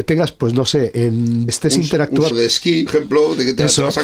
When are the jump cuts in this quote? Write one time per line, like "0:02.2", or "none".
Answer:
0:01.5
0:02.3
0:02.9